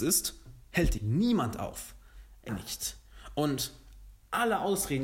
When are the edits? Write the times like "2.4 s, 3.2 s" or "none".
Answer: 1.0 s, 2.5 s